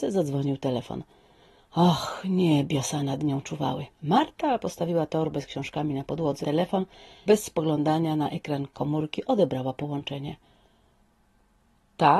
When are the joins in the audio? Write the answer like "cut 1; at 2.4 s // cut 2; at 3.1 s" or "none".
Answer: cut 1; at 3.9 s // cut 2; at 6.4 s // cut 3; at 7.3 s